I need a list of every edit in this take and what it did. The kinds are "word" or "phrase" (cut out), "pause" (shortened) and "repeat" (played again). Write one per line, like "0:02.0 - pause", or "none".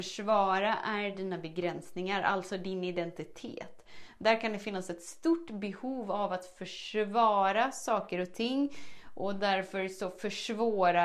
none